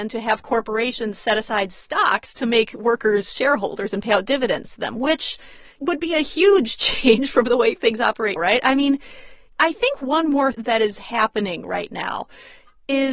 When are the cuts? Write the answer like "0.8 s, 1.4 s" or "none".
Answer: 8.4 s, 10.5 s